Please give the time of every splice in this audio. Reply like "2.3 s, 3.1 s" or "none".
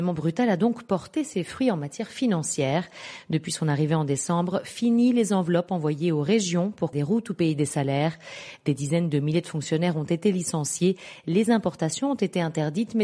6.9 s